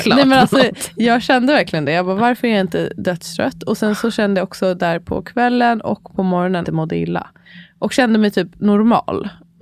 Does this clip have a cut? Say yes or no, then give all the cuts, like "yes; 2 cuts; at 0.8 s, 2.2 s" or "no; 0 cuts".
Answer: yes; 1 cut; at 6.6 s